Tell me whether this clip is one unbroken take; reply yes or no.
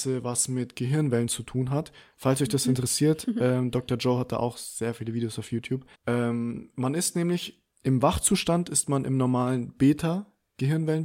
no